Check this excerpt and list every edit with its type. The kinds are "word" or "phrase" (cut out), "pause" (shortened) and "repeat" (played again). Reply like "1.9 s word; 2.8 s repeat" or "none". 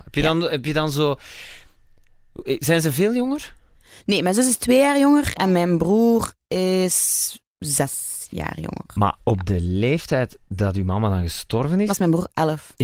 10.4 s pause